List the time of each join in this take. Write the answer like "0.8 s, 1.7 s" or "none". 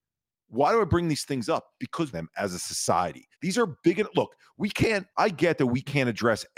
2.1 s, 3.3 s, 5.1 s